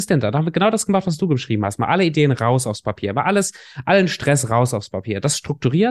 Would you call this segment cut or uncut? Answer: uncut